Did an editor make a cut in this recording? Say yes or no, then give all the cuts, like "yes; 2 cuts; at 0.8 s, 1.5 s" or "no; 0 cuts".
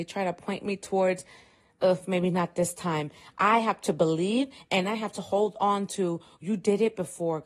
no; 0 cuts